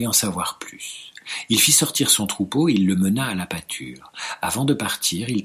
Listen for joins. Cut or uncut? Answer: uncut